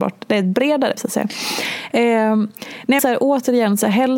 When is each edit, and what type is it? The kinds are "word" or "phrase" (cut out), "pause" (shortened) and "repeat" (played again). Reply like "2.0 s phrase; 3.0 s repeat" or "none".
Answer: 1.0 s word; 3.0 s word